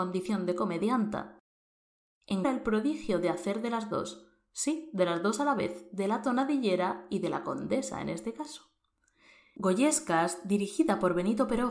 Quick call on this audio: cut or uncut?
cut